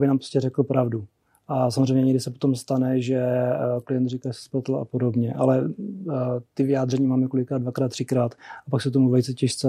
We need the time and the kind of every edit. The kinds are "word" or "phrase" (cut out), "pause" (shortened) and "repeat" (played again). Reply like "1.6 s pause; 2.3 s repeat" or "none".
none